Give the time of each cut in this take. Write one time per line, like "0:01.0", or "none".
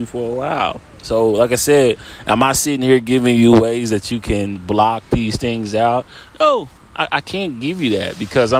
none